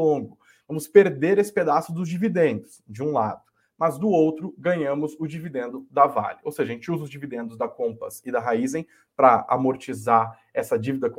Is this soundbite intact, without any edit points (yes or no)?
yes